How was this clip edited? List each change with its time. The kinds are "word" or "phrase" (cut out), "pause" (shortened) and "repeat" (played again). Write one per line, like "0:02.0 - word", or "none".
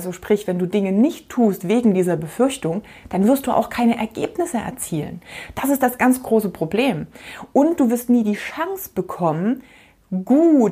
none